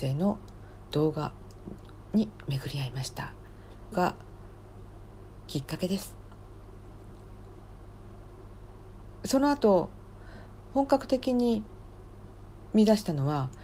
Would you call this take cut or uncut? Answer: cut